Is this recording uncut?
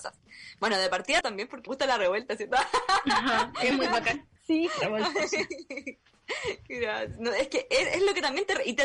no; 4 cuts; at 1.2 s, 1.7 s, 3.7 s, 4.4 s

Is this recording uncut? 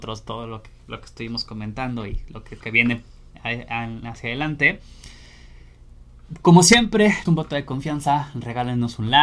no; 2 cuts; at 2.6 s, 7.3 s

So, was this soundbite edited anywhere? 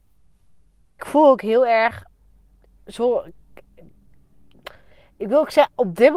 yes; 1 cut; at 1.0 s

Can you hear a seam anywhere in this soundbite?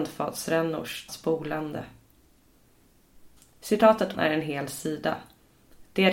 yes; 2 cuts; at 1.1 s, 4.1 s

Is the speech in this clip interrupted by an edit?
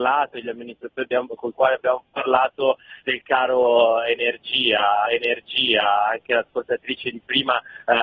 yes; 3 cuts; at 1.0 s, 3.0 s, 5.1 s

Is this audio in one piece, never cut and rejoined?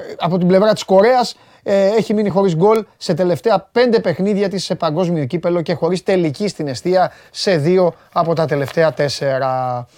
yes; 0 cuts

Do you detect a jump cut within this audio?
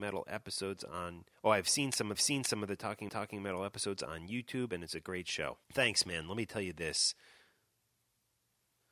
yes; 4 cuts; at 1.3 s, 2.1 s, 3.1 s, 5.6 s

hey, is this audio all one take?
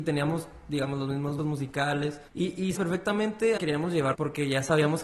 no; 5 cuts; at 1.4 s, 2.3 s, 2.7 s, 3.6 s, 4.1 s

